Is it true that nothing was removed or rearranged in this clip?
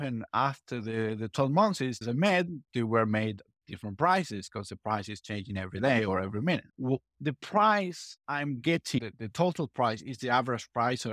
no; 3 cuts; at 2.0 s, 2.7 s, 6.7 s

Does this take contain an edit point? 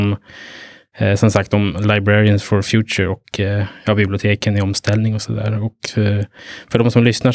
no; 0 cuts

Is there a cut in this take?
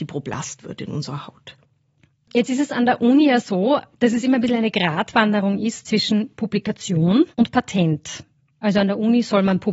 yes; 1 cut; at 7.3 s

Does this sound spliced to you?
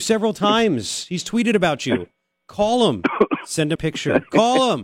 yes; 1 cut; at 3.8 s

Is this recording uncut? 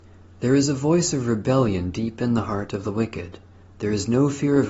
yes; 0 cuts

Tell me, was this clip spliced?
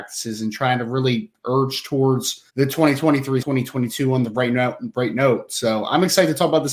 yes; 2 cuts; at 2.5 s, 3.4 s

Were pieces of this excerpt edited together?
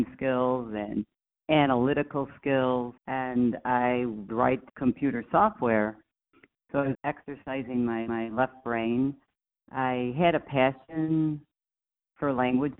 yes; 6 cuts; at 1.4 s, 3.0 s, 4.3 s, 4.7 s, 6.9 s, 8.1 s

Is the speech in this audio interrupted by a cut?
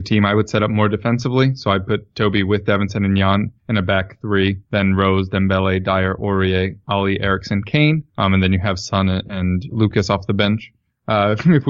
yes; 4 cuts; at 3.6 s, 4.6 s, 8.1 s, 9.7 s

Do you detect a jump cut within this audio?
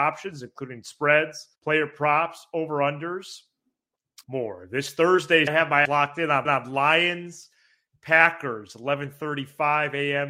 yes; 5 cuts; at 1.5 s, 4.2 s, 5.5 s, 5.8 s, 6.4 s

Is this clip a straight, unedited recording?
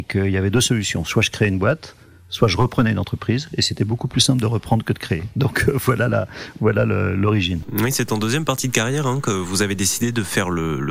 yes; 0 cuts

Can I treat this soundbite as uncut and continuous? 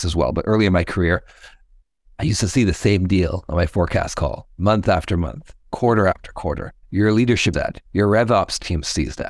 no; 4 cuts; at 1.8 s, 6.8 s, 7.5 s, 7.9 s

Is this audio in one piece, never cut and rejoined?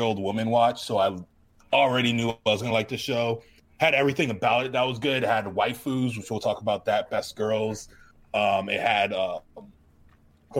yes; 0 cuts

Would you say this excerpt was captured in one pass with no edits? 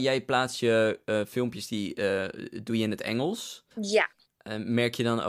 no; 1 cut; at 3.7 s

